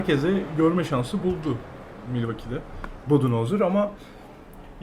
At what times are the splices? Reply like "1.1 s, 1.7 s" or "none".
none